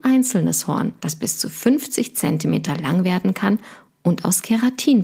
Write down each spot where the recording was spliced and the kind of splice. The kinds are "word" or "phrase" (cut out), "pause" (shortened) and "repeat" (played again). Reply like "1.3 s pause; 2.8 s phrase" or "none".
1.0 s pause